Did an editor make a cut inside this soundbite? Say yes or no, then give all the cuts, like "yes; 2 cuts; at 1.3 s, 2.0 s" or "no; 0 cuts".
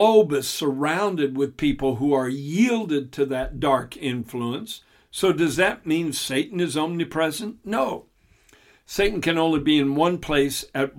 no; 0 cuts